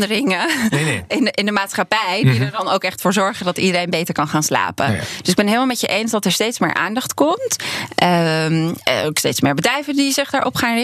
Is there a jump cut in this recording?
no; 0 cuts

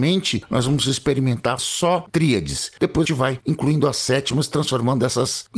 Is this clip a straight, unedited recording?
no; 4 cuts; at 1.6 s, 2.1 s, 3.0 s, 3.4 s

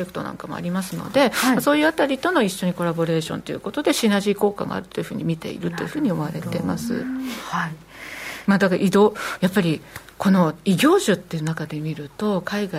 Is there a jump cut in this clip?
no; 0 cuts

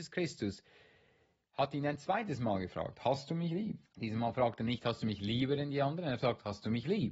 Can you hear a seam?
yes; 1 cut; at 3.9 s

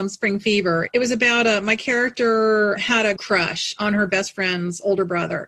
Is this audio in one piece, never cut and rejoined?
no; 1 cut; at 3.2 s

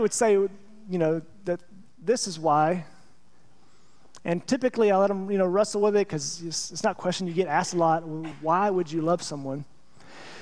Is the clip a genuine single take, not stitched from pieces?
yes; 0 cuts

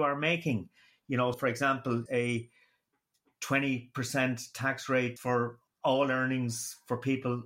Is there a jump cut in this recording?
yes; 4 cuts; at 1.3 s, 2.1 s, 5.2 s, 5.7 s

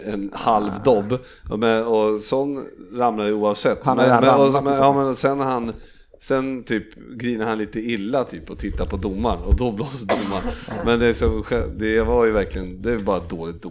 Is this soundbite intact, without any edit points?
yes; 0 cuts

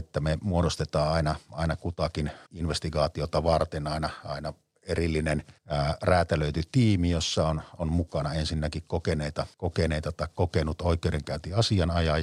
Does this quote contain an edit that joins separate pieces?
yes; 3 cuts; at 2.5 s, 5.6 s, 9.5 s

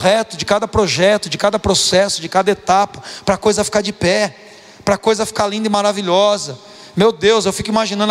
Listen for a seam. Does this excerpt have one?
no; 0 cuts

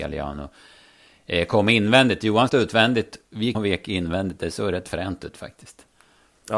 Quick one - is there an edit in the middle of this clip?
yes; 2 cuts; at 2.5 s, 3.5 s

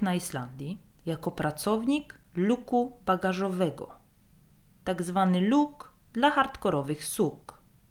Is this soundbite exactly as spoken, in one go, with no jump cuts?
yes; 0 cuts

